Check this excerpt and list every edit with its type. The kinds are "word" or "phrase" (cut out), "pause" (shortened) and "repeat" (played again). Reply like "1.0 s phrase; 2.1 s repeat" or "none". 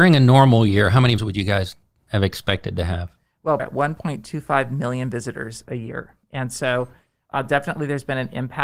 1.2 s word; 2.1 s word; 3.6 s phrase; 6.2 s pause